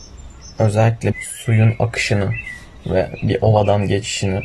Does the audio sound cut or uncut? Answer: cut